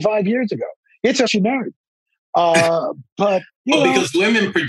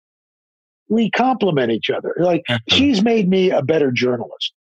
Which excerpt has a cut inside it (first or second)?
first